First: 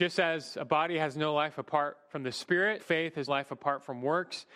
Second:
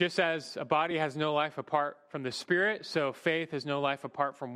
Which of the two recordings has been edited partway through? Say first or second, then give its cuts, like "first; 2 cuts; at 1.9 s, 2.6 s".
first; 2 cuts; at 2.8 s, 3.3 s